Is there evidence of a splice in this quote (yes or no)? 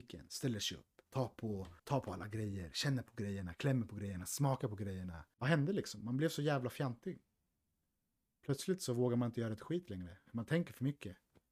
yes